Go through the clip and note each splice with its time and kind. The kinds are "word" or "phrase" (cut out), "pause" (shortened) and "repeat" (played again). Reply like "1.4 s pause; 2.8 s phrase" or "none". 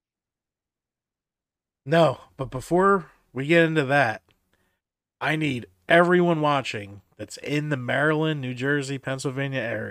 none